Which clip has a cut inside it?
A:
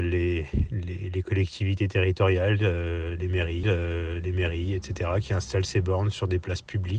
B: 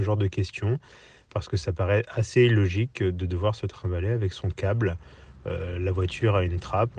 A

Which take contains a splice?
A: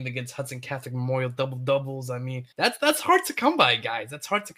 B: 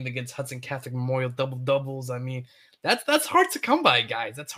A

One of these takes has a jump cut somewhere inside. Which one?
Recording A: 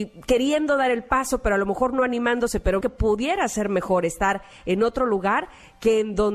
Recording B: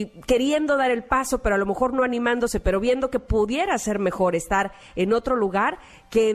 A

